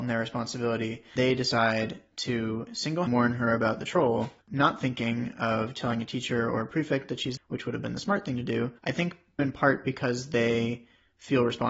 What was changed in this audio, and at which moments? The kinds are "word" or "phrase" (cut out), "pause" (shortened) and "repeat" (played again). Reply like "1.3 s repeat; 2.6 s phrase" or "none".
1.2 s word; 3.1 s phrase; 4.4 s pause; 7.4 s word; 8.8 s pause; 9.4 s word